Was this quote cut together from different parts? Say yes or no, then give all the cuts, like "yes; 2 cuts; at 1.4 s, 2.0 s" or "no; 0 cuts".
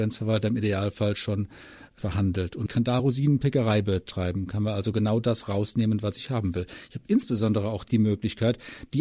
no; 0 cuts